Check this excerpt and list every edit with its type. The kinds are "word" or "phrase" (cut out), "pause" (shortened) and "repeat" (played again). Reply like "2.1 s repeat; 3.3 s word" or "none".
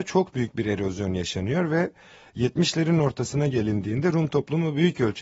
none